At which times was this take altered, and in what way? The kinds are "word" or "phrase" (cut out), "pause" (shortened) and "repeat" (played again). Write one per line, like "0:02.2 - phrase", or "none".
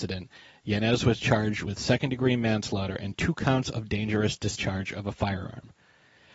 none

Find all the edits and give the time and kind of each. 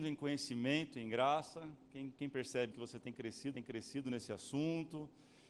0:02.7 - word
0:03.5 - repeat

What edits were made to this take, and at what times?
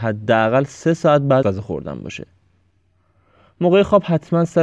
0:01.4 - word

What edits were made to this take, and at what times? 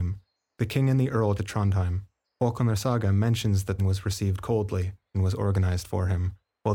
0:01.4 - word
0:02.2 - pause
0:03.8 - word
0:05.1 - phrase

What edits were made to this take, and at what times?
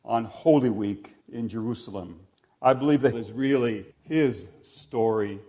0:01.2 - pause
0:02.3 - pause
0:03.1 - phrase
0:03.9 - pause

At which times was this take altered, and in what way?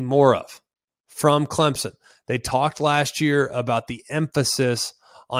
none

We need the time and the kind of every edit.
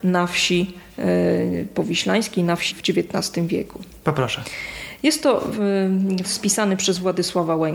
0:02.7 - word
0:06.2 - word

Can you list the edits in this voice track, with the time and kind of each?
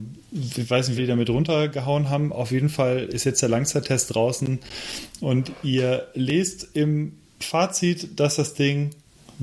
0:01.0 - phrase

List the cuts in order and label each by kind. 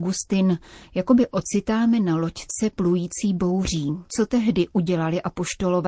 0:04.1 - pause

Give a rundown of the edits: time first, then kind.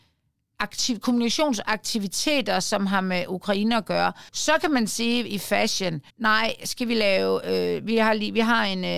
0:04.3 - pause
0:06.1 - pause

